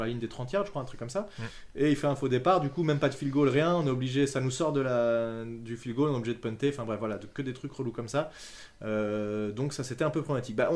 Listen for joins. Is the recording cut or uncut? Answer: uncut